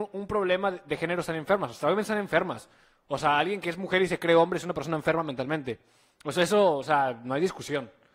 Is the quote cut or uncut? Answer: uncut